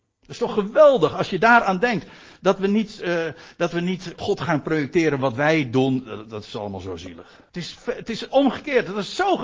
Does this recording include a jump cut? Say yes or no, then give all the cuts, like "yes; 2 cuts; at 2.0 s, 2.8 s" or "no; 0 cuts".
yes; 2 cuts; at 4.2 s, 7.5 s